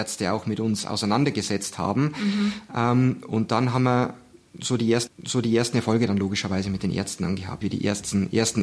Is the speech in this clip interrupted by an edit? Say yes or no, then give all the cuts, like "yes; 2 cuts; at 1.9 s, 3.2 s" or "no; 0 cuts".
yes; 2 cuts; at 5.1 s, 7.6 s